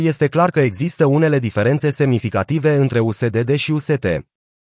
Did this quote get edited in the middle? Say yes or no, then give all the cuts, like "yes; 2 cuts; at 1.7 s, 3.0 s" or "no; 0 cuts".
no; 0 cuts